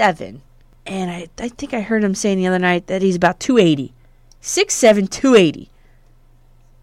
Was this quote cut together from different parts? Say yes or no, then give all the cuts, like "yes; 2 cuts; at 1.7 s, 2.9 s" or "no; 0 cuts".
no; 0 cuts